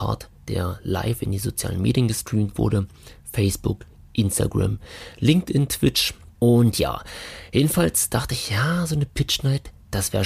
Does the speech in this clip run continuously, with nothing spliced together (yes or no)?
yes